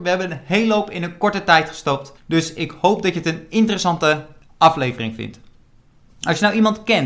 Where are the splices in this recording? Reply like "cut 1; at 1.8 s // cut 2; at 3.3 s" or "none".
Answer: cut 1; at 2.2 s